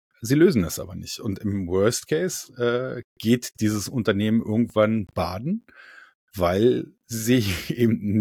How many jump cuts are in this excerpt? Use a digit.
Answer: 0